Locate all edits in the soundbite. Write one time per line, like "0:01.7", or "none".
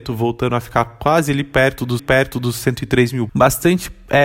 0:02.0
0:03.3